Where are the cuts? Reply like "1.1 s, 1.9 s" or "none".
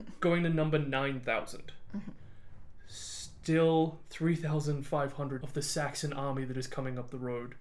5.4 s

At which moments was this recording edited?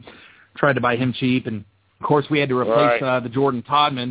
1.9 s

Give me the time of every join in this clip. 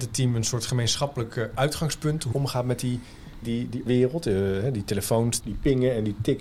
2.3 s, 3.4 s, 3.9 s, 5.4 s

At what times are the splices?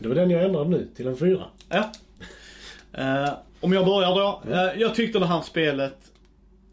3.5 s

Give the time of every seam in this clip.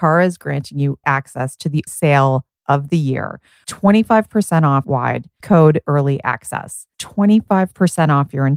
1.0 s, 1.9 s, 3.6 s, 4.8 s, 5.4 s, 5.8 s, 6.9 s

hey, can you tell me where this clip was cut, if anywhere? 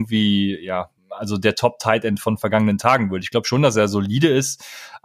1.0 s

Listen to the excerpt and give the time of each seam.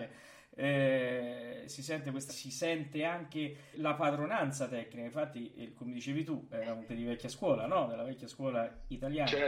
2.3 s, 3.7 s, 6.9 s

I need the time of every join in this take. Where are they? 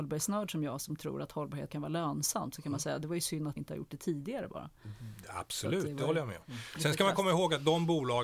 1.7 s, 3.6 s

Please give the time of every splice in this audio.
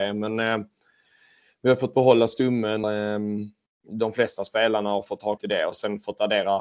2.8 s, 5.4 s

